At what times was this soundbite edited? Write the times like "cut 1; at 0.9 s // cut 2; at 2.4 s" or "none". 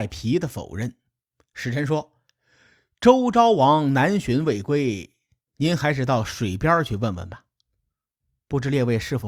none